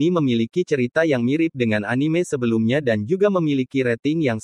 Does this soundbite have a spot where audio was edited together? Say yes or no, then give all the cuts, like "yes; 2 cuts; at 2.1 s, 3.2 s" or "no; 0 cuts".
no; 0 cuts